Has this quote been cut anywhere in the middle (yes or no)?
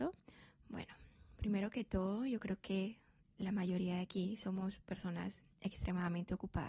no